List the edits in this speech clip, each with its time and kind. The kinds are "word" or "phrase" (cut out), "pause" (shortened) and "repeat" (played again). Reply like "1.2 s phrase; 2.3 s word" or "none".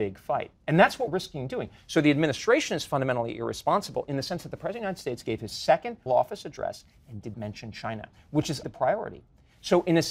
1.1 s word; 6.1 s word; 7.3 s word; 8.6 s word